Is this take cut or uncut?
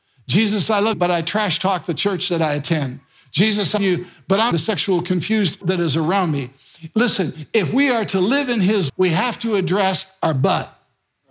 cut